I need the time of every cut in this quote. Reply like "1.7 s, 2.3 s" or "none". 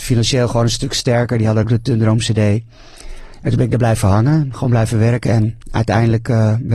1.6 s